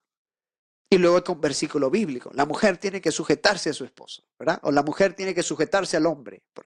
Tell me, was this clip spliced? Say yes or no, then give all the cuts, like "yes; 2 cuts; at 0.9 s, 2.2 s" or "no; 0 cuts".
yes; 1 cut; at 1.2 s